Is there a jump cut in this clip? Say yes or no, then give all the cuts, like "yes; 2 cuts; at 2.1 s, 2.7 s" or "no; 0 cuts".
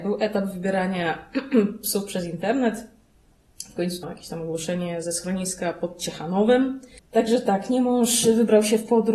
yes; 3 cuts; at 4.0 s, 5.0 s, 7.0 s